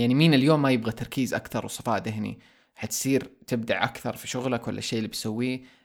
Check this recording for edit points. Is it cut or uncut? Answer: uncut